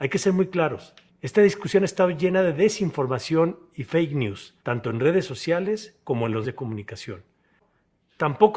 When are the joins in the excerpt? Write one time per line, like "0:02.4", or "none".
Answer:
0:01.1
0:04.6
0:06.4